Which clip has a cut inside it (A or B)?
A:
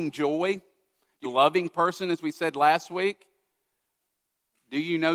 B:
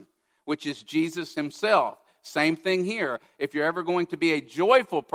A